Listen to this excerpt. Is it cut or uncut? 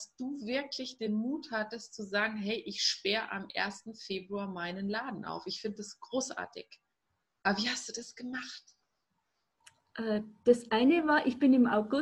uncut